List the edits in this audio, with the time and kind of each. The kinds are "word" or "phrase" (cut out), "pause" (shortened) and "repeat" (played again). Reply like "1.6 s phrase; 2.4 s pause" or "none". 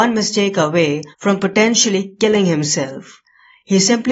1.1 s pause